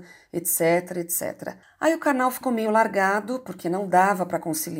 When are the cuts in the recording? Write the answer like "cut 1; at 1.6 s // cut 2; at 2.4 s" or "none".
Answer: cut 1; at 1.6 s